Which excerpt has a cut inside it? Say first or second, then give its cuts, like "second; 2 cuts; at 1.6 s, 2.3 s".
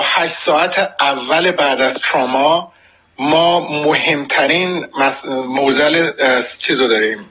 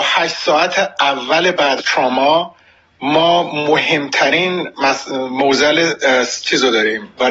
second; 1 cut; at 1.8 s